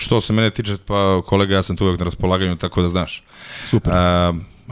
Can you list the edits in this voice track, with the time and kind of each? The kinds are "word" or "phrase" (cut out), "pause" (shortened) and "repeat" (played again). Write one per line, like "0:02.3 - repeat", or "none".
none